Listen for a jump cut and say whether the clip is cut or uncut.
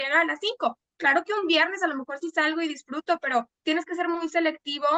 uncut